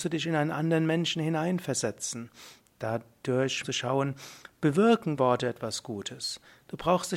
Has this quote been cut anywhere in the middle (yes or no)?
yes